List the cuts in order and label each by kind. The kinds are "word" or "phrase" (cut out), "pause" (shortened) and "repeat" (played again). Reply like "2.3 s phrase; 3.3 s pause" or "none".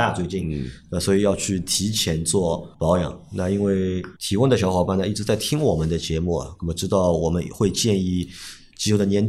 2.7 s pause; 4.2 s pause